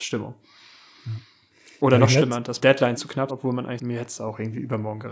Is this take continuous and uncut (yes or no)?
no